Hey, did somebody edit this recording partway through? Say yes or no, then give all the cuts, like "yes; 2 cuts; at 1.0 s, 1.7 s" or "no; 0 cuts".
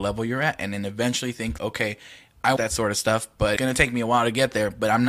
yes; 3 cuts; at 1.6 s, 2.6 s, 3.6 s